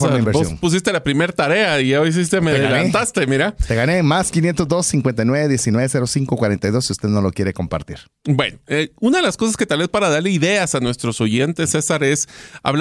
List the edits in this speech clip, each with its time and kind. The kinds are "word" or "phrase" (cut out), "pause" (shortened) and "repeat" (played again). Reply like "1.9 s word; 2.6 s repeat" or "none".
none